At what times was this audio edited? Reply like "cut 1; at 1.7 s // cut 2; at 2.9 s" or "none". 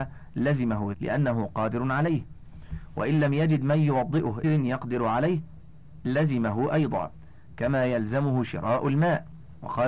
cut 1; at 0.9 s // cut 2; at 4.4 s